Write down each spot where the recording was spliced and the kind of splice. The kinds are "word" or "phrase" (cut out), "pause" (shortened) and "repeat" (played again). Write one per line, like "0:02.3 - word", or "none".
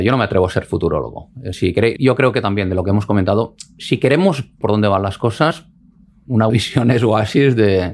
0:01.5 - word
0:02.0 - word
0:04.6 - word
0:06.5 - word